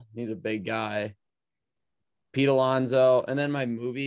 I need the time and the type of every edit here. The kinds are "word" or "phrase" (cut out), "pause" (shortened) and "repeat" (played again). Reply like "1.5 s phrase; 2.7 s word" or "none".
none